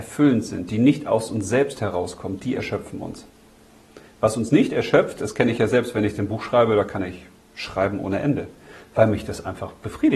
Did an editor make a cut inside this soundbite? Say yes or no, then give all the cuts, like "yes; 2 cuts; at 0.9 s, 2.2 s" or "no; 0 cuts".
no; 0 cuts